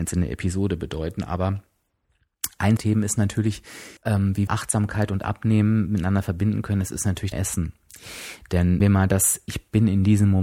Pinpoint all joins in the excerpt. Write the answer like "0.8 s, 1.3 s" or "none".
2.8 s, 4.0 s, 4.5 s, 7.3 s, 8.8 s